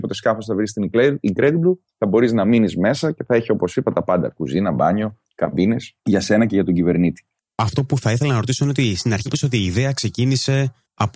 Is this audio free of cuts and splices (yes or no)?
no